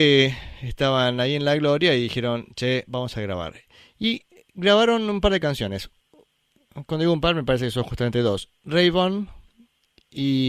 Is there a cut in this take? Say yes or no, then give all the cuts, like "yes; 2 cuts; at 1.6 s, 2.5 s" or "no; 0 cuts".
no; 0 cuts